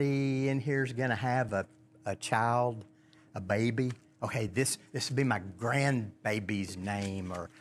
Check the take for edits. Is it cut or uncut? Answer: uncut